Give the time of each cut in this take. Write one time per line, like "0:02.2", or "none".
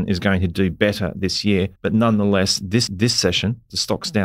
0:01.8
0:02.9